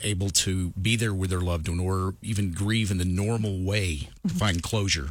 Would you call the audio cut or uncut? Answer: cut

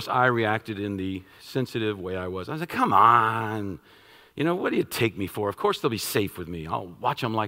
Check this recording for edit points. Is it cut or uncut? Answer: uncut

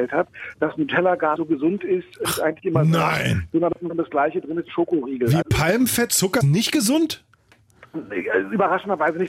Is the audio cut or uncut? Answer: cut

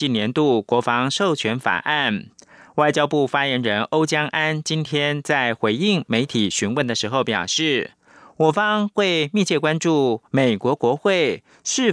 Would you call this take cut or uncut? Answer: uncut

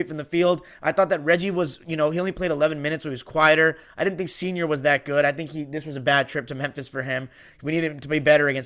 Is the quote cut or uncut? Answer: uncut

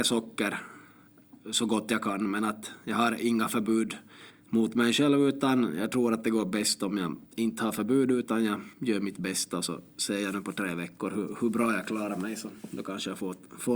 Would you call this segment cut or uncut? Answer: cut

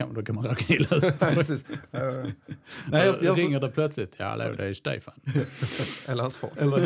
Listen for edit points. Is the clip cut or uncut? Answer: uncut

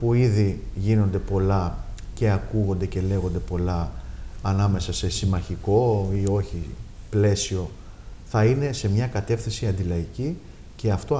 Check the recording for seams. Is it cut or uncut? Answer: uncut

